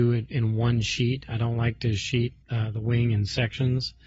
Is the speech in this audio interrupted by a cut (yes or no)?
yes